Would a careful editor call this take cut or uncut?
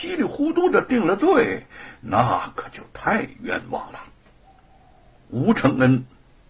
uncut